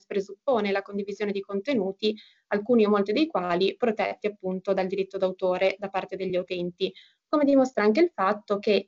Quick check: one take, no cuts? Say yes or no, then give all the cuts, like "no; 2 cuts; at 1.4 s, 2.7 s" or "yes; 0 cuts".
yes; 0 cuts